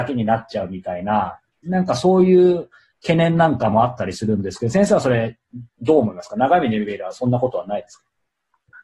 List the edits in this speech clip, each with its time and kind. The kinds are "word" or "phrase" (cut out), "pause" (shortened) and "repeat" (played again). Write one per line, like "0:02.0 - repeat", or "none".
0:05.7 - pause